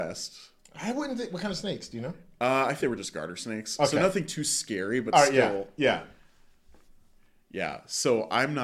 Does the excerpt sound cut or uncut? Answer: cut